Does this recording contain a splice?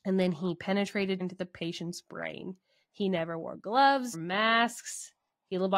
yes; 2 cuts; at 1.2 s, 4.1 s

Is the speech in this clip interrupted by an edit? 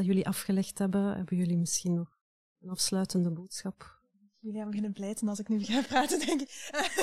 no; 0 cuts

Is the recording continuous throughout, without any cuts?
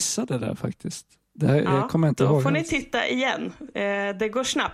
yes; 0 cuts

